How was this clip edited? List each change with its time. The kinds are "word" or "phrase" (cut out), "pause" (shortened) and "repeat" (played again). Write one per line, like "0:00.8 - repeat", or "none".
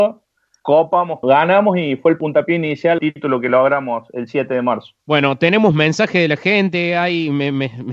0:01.2 - phrase
0:03.0 - phrase
0:05.0 - pause